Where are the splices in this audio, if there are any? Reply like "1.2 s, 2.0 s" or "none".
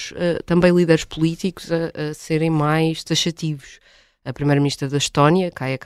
none